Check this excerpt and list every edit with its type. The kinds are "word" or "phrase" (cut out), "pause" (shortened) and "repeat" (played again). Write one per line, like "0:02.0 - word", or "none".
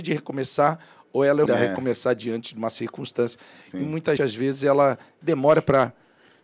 0:01.5 - word
0:04.2 - word
0:05.2 - phrase